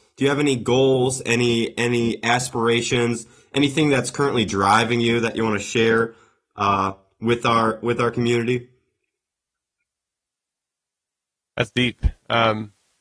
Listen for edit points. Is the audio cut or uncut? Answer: uncut